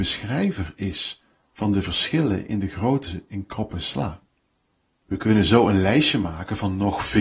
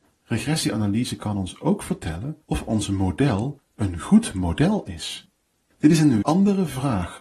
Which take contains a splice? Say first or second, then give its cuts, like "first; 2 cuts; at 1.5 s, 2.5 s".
second; 2 cuts; at 2.4 s, 6.2 s